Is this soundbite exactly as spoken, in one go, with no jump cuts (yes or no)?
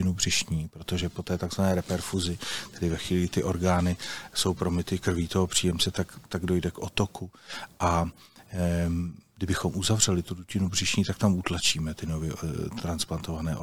yes